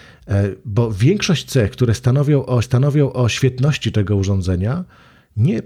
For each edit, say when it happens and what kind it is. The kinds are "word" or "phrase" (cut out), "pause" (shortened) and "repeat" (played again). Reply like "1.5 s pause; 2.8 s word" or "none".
2.6 s repeat